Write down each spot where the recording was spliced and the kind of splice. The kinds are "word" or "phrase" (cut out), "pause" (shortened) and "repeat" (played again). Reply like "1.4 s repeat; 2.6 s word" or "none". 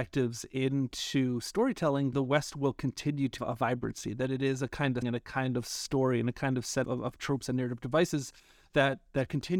2.1 s word; 3.4 s word; 5.0 s word; 6.8 s word